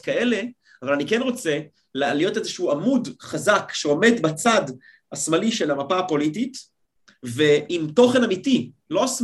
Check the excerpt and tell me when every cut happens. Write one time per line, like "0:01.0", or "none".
none